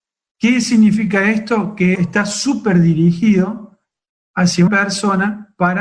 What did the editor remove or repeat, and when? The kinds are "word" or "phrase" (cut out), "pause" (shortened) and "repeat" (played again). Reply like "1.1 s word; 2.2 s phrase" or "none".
1.9 s word; 4.7 s word